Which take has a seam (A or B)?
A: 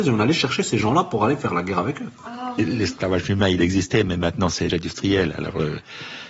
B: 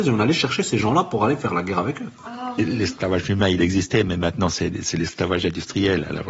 A